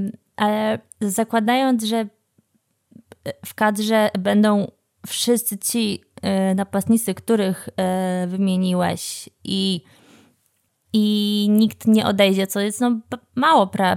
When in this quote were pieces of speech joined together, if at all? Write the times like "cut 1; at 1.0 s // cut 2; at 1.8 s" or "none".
none